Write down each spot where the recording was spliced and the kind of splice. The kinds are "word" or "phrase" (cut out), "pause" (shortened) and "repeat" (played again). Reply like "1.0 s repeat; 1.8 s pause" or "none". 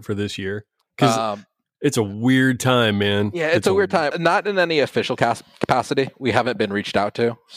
1.6 s pause; 4.1 s word